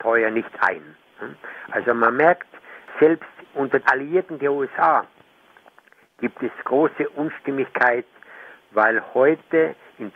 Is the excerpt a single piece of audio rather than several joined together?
no; 1 cut; at 3.8 s

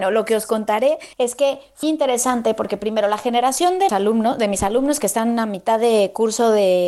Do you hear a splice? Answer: yes; 3 cuts; at 1.1 s, 1.8 s, 3.9 s

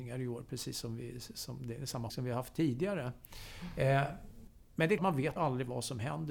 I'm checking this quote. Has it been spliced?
yes; 3 cuts; at 2.1 s, 5.0 s, 5.4 s

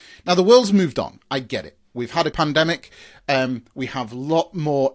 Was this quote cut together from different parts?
yes; 1 cut; at 2.3 s

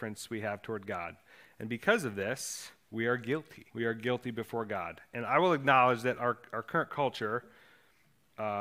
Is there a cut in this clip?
yes; 1 cut; at 3.7 s

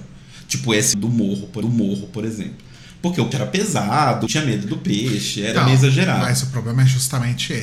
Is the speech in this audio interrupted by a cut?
yes; 4 cuts; at 0.9 s, 1.6 s, 3.3 s, 4.3 s

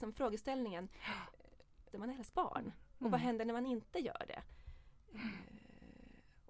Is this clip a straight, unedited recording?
no; 2 cuts; at 1.9 s, 2.3 s

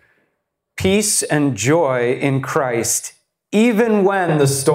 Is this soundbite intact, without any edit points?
yes; 0 cuts

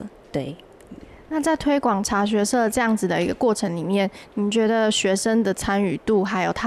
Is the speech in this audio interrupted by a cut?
no; 0 cuts

